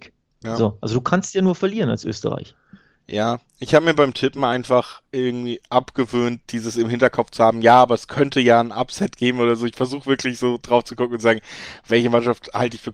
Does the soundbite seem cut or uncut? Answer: uncut